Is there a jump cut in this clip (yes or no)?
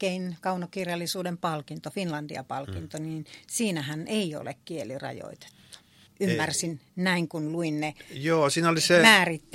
yes